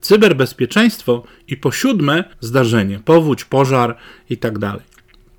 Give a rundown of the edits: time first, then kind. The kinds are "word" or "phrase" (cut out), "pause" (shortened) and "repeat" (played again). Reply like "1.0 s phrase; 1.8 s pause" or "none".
2.3 s word